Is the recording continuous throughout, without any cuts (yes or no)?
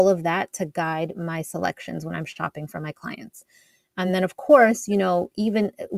yes